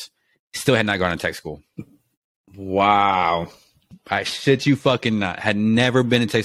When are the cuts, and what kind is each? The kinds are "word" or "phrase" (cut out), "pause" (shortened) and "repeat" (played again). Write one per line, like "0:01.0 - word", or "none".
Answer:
none